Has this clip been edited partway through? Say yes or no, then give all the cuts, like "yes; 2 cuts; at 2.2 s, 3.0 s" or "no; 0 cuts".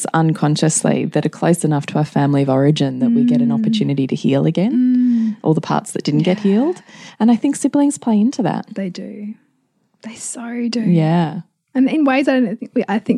no; 0 cuts